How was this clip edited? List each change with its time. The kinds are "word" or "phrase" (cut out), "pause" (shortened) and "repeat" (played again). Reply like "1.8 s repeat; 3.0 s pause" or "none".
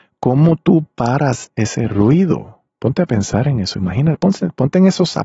2.7 s pause